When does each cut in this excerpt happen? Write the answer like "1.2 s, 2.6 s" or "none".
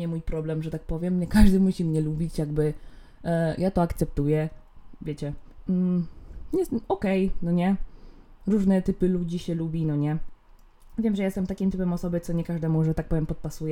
none

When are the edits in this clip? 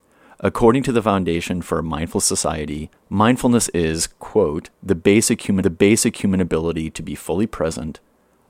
3.0 s, 4.7 s, 5.6 s

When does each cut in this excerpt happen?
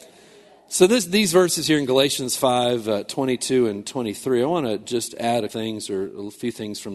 5.5 s

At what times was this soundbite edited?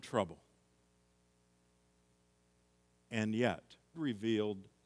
3.9 s

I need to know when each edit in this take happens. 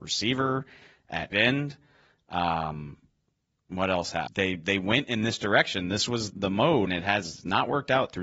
1.3 s, 4.3 s, 6.3 s, 6.9 s

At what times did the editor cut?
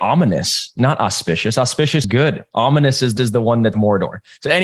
2.0 s, 3.2 s, 3.7 s

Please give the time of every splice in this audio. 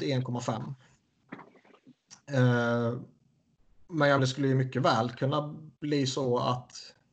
4.2 s, 5.8 s

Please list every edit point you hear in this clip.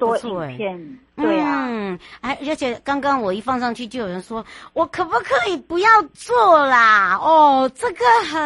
none

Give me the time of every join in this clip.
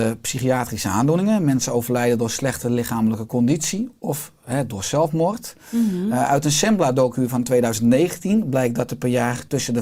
none

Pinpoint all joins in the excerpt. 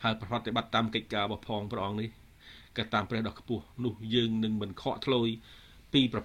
3.7 s

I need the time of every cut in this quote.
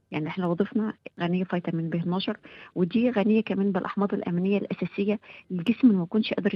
1.1 s

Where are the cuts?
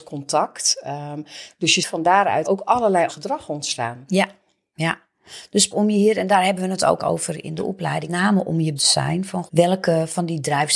1.8 s, 2.4 s, 3.1 s, 5.7 s, 7.0 s, 8.1 s, 8.8 s, 9.5 s

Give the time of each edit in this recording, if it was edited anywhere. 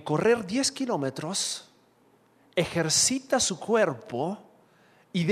none

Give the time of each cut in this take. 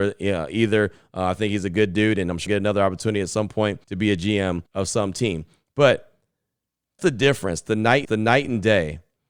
2.5 s, 3.8 s, 4.7 s, 7.0 s, 8.0 s

